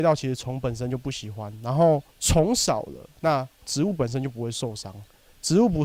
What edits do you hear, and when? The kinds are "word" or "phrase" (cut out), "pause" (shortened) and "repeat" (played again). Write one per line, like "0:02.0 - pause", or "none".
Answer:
0:02.1 - pause